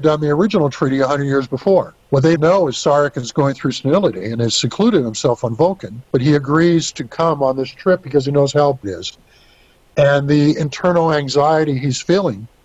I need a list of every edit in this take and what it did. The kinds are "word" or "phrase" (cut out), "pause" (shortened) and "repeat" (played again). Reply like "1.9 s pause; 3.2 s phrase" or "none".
2.0 s pause; 2.4 s word; 6.1 s pause; 8.8 s word